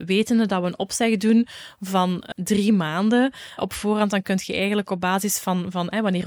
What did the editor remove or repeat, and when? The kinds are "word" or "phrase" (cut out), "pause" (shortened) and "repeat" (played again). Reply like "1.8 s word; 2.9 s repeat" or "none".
2.3 s word; 3.6 s word